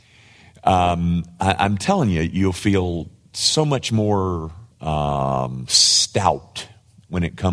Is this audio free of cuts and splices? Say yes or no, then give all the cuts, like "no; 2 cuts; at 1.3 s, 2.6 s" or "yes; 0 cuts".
no; 1 cut; at 4.7 s